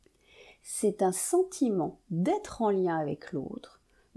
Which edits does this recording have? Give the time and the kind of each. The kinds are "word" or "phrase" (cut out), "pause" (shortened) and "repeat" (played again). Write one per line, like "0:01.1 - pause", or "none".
none